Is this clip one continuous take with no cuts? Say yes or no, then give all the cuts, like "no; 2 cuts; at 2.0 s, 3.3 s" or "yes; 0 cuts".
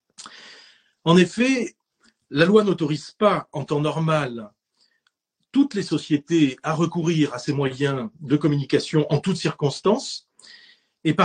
yes; 0 cuts